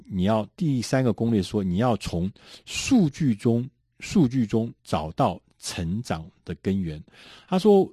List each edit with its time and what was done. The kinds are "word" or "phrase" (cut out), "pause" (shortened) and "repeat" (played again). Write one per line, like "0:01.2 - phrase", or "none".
0:03.8 - pause
0:04.8 - pause